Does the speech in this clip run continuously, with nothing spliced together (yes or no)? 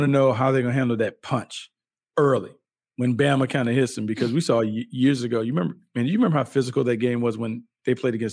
yes